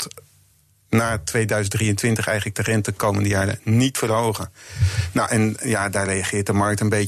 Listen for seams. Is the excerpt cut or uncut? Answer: uncut